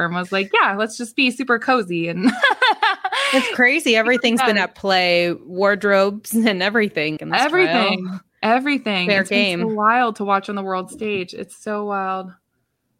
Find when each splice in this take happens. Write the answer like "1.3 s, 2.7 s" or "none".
7.2 s